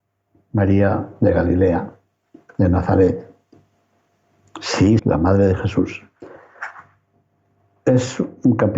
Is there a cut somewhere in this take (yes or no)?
yes